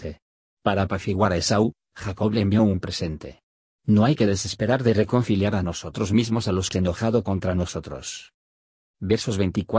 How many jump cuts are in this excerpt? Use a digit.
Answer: 1